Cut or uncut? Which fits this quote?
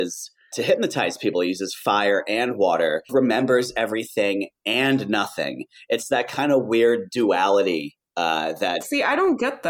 cut